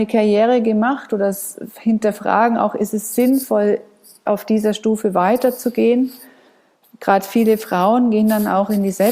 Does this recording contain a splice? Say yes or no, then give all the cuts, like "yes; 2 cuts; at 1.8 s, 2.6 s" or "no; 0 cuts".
no; 0 cuts